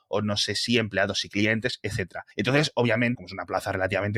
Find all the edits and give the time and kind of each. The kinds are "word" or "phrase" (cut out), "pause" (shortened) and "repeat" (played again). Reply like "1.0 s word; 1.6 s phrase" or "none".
2.3 s pause; 3.1 s word